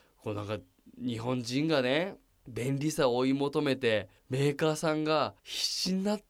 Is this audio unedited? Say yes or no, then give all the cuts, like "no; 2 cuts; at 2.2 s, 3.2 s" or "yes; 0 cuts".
no; 3 cuts; at 2.3 s, 4.2 s, 5.4 s